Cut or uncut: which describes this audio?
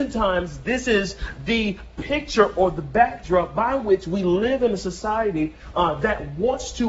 uncut